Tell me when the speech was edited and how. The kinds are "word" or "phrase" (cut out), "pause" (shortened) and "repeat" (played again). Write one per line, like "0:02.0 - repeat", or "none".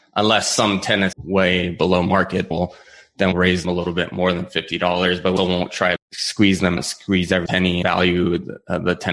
0:01.1 - word
0:02.5 - word
0:03.3 - word
0:03.6 - word
0:05.4 - word
0:06.0 - word
0:06.8 - word
0:07.5 - word
0:07.8 - word